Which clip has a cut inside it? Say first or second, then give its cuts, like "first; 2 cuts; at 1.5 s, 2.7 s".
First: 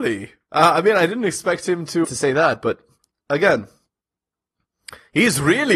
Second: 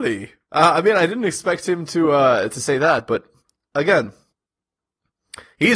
first; 1 cut; at 2.0 s